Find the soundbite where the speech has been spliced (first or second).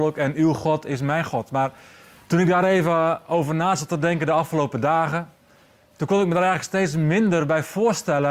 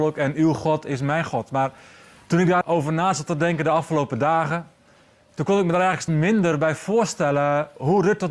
second